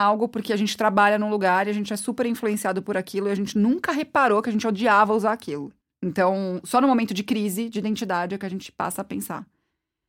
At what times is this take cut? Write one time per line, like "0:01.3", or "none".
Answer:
0:05.8